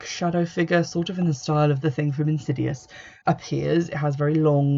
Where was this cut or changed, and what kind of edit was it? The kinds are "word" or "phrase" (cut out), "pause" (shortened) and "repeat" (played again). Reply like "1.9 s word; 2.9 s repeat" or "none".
3.2 s word